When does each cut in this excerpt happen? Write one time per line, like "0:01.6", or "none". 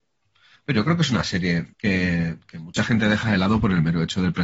0:01.7

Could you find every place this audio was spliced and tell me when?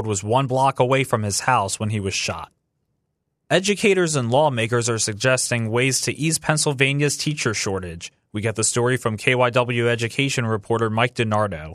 none

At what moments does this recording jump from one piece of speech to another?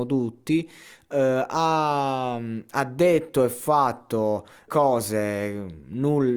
0:04.7

